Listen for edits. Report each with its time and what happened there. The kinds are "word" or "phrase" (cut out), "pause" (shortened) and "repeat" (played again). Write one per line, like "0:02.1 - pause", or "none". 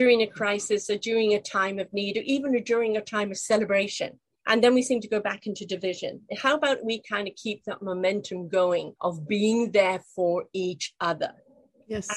0:04.3 - pause
0:09.0 - pause